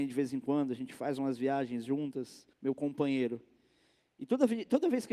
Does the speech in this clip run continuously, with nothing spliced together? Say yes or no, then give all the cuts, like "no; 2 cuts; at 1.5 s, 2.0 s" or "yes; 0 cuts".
no; 1 cut; at 2.5 s